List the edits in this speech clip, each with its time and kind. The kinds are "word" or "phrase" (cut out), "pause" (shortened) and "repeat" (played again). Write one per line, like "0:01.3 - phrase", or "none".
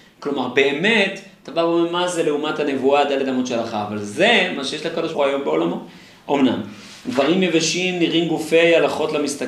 0:05.1 - word